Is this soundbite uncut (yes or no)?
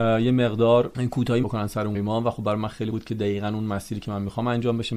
no